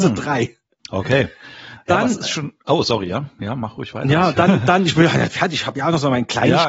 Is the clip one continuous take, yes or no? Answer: yes